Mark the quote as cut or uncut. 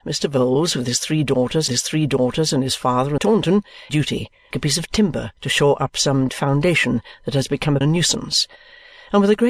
cut